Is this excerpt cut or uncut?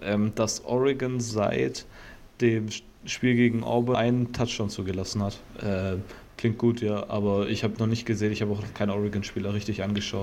cut